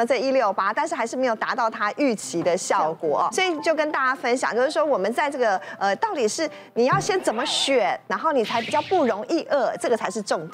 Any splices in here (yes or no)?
yes